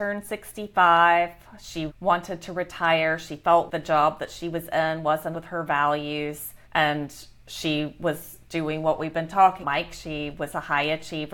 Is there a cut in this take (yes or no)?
yes